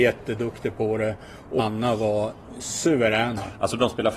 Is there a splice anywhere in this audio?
yes; 1 cut; at 1.6 s

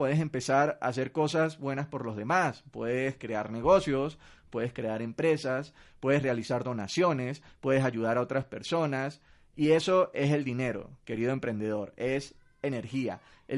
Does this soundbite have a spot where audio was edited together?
no; 0 cuts

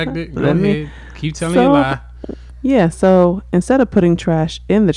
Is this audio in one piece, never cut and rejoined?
no; 1 cut; at 2.5 s

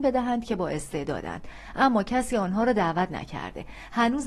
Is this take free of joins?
yes; 0 cuts

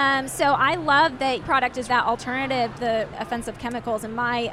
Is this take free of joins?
no; 4 cuts; at 1.4 s, 1.9 s, 2.7 s, 3.1 s

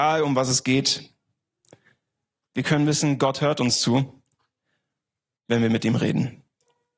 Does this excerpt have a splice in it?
no; 0 cuts

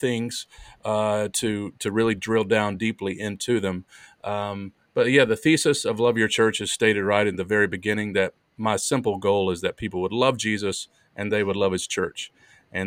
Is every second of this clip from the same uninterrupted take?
yes; 0 cuts

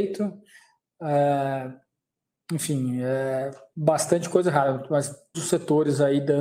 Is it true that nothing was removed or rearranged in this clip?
no; 1 cut; at 5.3 s

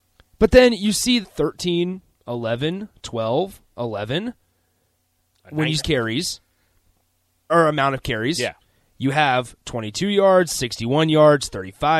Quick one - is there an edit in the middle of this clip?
yes; 3 cuts; at 1.2 s, 5.8 s, 7.5 s

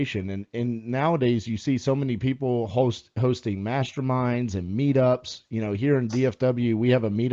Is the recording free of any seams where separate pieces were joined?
yes; 0 cuts

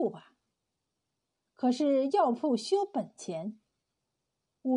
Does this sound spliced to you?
no; 0 cuts

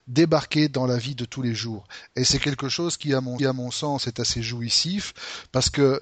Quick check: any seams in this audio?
yes; 1 cut; at 3.4 s

